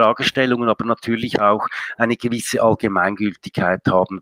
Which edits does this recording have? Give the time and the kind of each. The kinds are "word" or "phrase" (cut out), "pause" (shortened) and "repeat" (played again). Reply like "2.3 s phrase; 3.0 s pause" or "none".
none

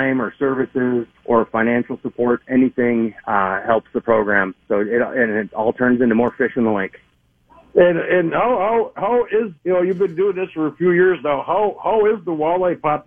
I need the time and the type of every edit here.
1.2 s pause; 4.6 s pause; 7.1 s pause; 9.6 s pause

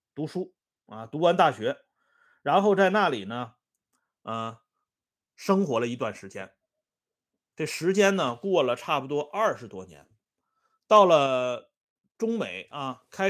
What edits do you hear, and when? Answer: none

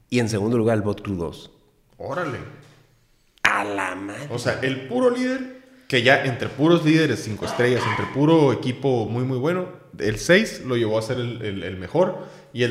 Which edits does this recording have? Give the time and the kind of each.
none

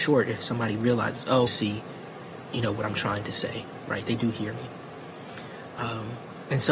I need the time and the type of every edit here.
1.5 s phrase

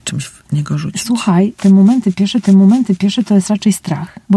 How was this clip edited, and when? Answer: 2.4 s repeat

